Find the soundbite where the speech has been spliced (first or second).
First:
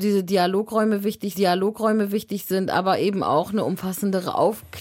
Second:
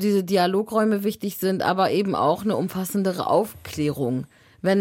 first